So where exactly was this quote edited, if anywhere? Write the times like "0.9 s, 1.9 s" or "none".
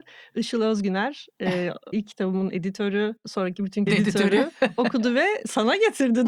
1.9 s, 3.2 s, 3.9 s